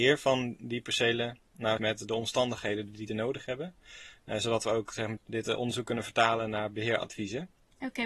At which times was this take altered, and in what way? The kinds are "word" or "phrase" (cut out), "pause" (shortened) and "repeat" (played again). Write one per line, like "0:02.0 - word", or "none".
0:01.8 - word
0:03.1 - word
0:05.2 - word